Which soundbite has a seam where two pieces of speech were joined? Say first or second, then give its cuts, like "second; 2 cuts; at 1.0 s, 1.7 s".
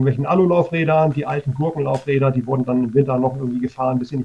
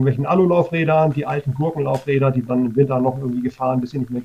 second; 1 cut; at 2.5 s